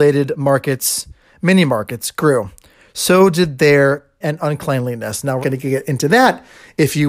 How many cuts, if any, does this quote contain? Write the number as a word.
two